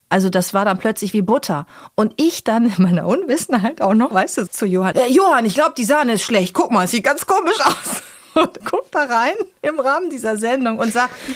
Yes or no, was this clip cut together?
yes